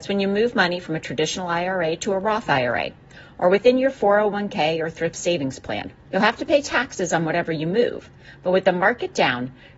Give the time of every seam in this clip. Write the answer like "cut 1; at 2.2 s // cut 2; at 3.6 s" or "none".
cut 1; at 6.0 s